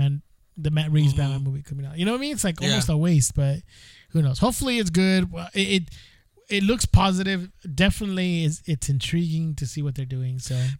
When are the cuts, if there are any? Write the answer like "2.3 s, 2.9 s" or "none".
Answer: none